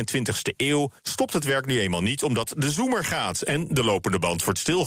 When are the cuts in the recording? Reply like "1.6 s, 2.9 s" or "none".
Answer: 1.0 s